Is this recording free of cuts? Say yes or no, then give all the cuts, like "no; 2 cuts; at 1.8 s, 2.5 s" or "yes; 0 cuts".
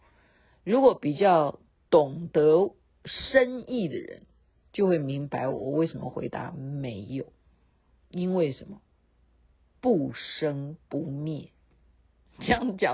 yes; 0 cuts